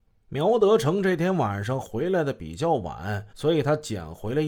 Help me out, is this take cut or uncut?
cut